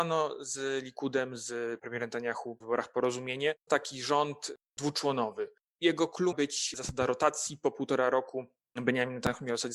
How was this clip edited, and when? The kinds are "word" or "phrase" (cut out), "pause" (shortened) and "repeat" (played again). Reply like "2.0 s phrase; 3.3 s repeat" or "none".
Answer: 1.8 s word; 2.6 s word; 3.7 s word; 6.3 s word